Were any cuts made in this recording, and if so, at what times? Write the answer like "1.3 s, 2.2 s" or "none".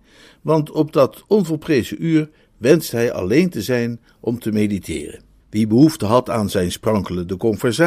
5.4 s